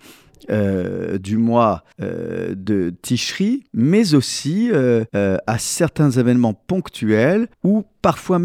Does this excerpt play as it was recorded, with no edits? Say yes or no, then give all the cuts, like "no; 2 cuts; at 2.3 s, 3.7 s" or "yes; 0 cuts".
no; 4 cuts; at 1.9 s, 3.7 s, 5.1 s, 7.5 s